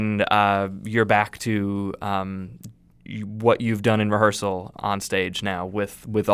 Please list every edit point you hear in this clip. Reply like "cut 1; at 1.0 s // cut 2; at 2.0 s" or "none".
cut 1; at 4.7 s